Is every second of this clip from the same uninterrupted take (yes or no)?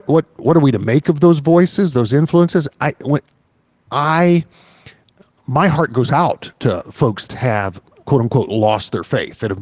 no